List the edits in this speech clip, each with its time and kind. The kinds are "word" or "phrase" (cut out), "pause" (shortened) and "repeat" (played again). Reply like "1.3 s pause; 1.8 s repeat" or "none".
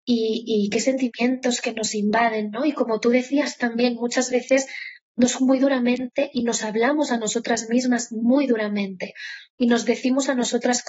5.4 s word